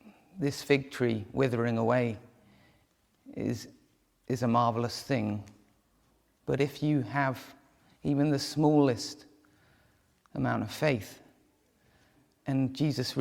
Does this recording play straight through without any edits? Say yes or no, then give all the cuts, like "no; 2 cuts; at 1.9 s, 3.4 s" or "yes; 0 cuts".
yes; 0 cuts